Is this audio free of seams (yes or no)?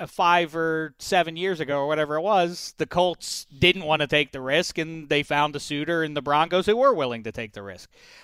yes